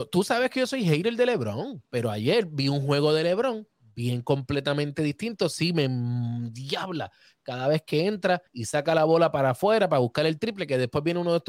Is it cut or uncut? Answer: cut